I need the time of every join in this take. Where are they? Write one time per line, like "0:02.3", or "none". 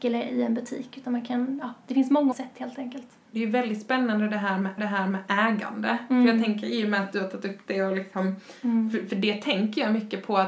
0:02.3
0:03.3
0:04.8